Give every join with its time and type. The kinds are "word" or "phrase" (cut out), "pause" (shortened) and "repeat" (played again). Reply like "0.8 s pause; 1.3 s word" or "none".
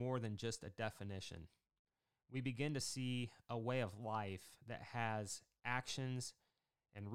none